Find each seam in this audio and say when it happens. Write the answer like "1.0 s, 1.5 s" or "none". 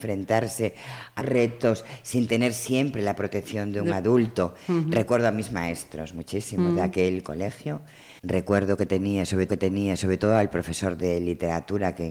1.2 s, 8.2 s, 9.5 s